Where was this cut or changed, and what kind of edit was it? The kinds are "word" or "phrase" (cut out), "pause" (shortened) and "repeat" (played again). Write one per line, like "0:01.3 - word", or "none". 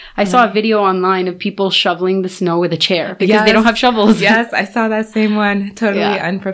none